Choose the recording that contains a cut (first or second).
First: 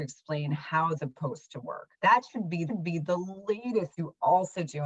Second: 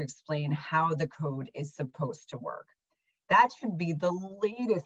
first